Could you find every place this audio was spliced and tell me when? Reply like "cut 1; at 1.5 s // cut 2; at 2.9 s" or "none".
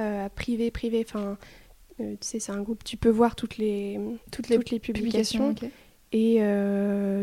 cut 1; at 4.2 s